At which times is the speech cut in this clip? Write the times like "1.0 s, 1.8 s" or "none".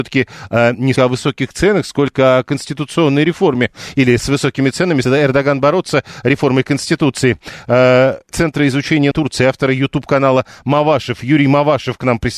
1.0 s, 5.0 s, 8.3 s, 9.1 s